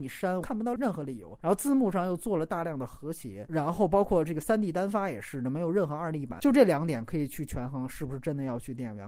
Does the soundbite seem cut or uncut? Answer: uncut